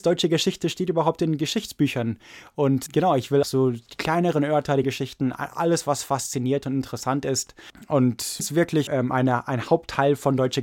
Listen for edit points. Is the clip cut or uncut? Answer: cut